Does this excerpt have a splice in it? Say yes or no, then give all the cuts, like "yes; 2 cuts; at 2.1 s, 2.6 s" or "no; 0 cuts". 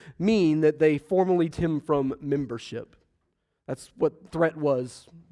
yes; 2 cuts; at 1.5 s, 4.3 s